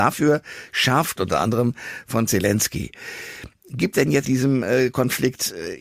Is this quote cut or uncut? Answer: cut